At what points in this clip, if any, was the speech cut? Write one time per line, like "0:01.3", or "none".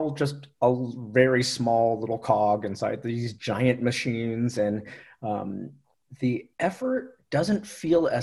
0:06.5